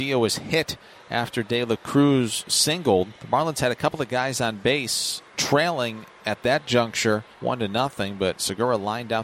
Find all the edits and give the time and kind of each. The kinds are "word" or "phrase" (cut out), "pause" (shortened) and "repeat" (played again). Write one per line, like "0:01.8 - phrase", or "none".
0:03.2 - pause
0:05.3 - pause
0:07.3 - pause